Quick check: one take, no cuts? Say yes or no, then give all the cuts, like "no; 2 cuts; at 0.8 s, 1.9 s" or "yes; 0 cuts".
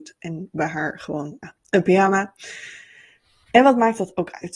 no; 1 cut; at 1.4 s